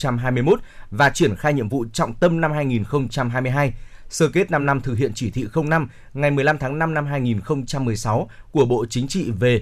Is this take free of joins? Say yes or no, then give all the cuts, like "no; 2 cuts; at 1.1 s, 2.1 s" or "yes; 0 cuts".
yes; 0 cuts